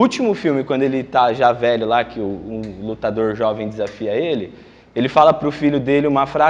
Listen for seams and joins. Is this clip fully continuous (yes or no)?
yes